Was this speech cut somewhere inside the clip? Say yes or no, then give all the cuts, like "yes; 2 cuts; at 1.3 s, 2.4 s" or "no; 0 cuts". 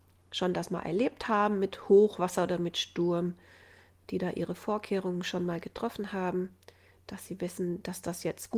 no; 0 cuts